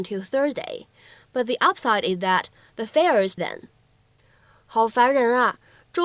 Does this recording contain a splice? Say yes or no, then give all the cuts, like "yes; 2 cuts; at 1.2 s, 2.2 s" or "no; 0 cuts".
yes; 1 cut; at 3.4 s